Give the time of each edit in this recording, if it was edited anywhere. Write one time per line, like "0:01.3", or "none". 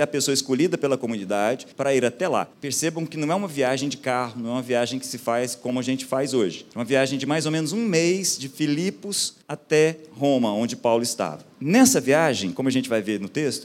0:01.7
0:02.5
0:06.7
0:09.4
0:11.5